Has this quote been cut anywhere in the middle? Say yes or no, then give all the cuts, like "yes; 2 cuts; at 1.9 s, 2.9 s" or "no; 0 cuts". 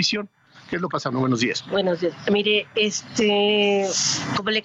yes; 1 cut; at 0.9 s